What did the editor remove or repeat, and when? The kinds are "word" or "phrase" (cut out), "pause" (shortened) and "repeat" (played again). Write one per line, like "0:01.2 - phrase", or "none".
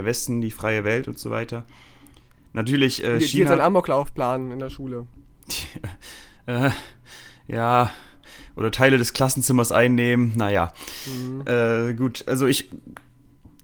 none